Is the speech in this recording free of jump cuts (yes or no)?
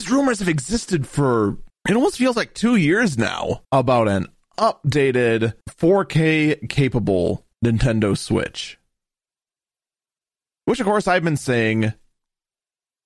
no